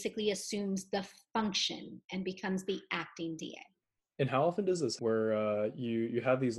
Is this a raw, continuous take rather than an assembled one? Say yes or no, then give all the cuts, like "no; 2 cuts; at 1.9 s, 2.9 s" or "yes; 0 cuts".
no; 2 cuts; at 3.8 s, 5.0 s